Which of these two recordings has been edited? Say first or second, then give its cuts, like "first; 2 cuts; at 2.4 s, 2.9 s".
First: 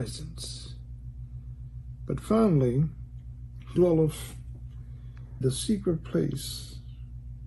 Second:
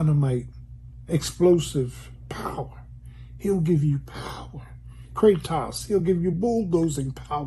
first; 2 cuts; at 3.8 s, 5.4 s